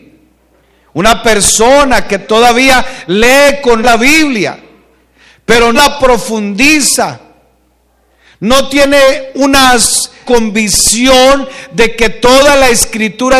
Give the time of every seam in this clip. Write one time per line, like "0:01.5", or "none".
0:03.8
0:05.7
0:10.3